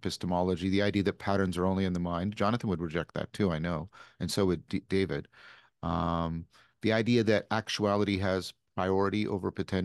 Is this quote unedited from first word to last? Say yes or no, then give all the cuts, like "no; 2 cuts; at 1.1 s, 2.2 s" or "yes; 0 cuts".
yes; 0 cuts